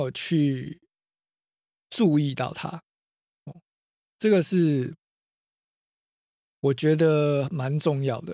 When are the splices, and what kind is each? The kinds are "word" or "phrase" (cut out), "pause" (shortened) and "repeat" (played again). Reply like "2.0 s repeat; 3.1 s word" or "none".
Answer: none